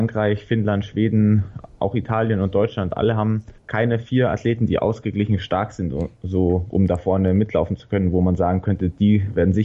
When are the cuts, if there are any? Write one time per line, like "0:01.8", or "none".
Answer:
0:03.6